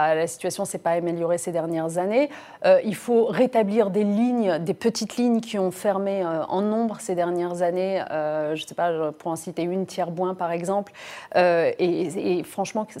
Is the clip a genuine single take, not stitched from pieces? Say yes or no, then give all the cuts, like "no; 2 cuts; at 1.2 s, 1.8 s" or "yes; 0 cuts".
yes; 0 cuts